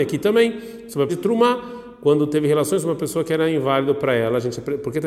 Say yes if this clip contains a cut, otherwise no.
yes